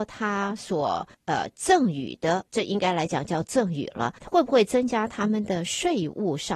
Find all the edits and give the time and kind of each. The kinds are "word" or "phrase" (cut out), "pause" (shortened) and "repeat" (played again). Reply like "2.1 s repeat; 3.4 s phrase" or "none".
1.1 s pause; 2.5 s pause; 4.2 s pause